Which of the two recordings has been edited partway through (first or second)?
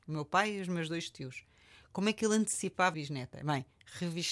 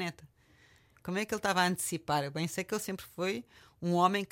first